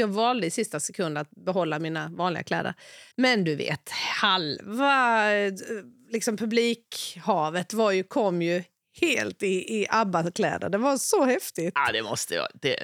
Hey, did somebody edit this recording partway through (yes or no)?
yes